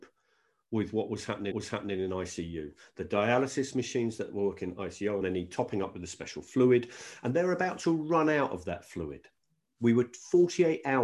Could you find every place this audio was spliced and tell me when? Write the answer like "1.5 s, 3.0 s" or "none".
1.5 s, 5.2 s